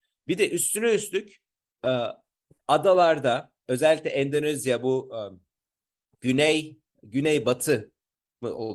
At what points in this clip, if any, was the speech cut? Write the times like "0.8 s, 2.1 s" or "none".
none